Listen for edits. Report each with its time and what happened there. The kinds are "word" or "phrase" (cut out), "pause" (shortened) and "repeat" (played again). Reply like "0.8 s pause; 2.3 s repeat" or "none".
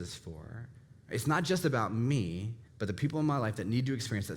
2.7 s pause